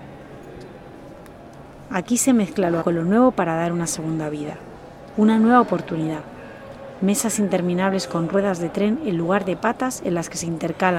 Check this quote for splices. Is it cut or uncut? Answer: cut